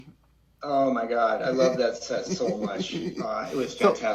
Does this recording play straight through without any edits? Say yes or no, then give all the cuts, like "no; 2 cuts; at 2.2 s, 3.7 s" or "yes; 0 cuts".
yes; 0 cuts